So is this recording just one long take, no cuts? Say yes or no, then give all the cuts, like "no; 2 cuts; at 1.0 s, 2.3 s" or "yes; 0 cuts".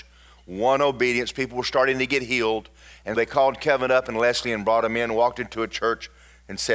no; 1 cut; at 3.1 s